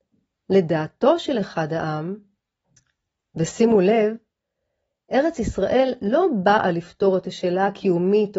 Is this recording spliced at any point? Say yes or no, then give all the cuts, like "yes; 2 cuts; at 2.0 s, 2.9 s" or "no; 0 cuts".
no; 0 cuts